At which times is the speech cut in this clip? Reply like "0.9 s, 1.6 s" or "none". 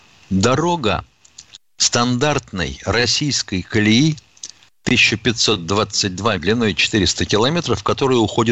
6.4 s